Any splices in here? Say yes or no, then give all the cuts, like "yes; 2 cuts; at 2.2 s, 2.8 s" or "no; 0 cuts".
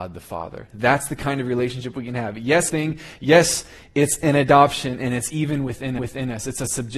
yes; 2 cuts; at 2.7 s, 6.0 s